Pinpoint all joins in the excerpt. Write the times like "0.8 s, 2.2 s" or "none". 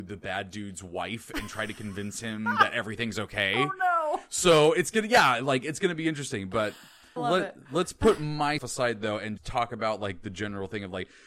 7.2 s, 8.6 s, 9.4 s